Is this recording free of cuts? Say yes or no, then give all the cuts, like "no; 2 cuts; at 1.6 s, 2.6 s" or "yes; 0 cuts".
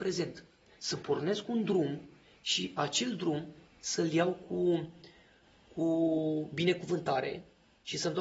yes; 0 cuts